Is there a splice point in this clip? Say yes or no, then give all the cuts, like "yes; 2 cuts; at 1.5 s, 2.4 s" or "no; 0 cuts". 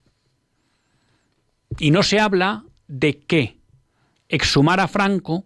no; 0 cuts